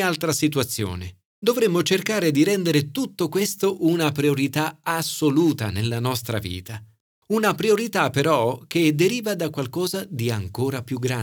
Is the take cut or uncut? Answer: cut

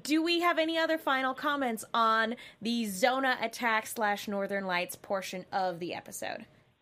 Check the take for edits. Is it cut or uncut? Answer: uncut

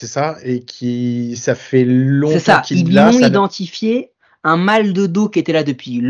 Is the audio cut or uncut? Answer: uncut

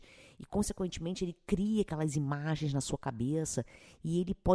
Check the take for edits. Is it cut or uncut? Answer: uncut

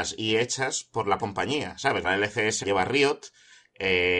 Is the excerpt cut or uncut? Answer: cut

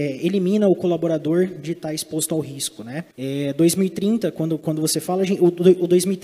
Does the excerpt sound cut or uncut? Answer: cut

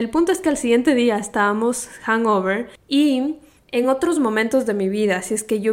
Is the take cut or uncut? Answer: uncut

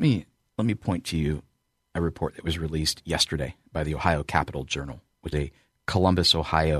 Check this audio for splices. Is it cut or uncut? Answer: cut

